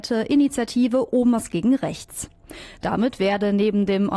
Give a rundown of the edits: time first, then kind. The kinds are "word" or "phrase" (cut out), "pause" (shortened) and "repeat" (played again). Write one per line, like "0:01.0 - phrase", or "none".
none